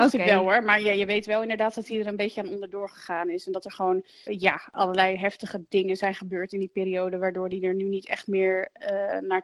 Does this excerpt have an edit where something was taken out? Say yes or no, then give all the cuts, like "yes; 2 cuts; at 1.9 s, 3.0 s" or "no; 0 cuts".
yes; 1 cut; at 4.3 s